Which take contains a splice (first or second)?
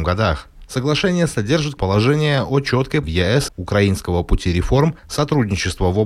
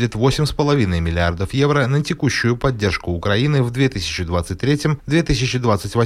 first